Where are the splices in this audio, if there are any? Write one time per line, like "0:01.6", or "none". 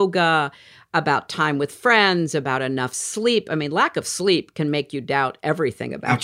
none